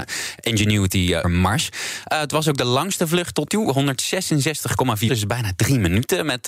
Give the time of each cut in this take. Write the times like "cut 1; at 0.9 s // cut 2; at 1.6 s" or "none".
cut 1; at 1.2 s // cut 2; at 3.5 s // cut 3; at 5.1 s